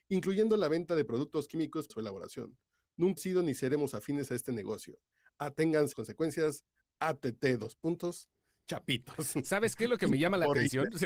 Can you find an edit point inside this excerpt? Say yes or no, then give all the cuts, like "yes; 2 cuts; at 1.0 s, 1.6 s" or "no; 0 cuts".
yes; 3 cuts; at 1.9 s, 3.2 s, 5.9 s